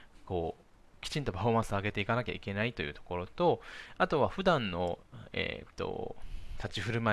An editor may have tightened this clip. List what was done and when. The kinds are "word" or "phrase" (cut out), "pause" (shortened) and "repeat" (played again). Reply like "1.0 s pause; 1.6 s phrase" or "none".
none